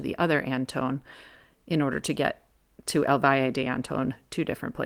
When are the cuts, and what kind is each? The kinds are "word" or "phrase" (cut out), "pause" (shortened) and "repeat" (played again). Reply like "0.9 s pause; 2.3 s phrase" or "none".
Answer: none